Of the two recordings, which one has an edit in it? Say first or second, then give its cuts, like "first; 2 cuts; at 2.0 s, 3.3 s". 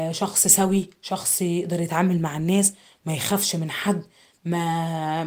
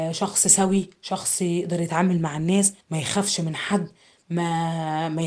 second; 1 cut; at 2.8 s